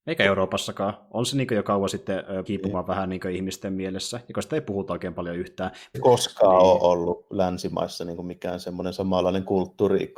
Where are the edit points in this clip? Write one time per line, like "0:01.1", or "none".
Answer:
0:02.5
0:05.9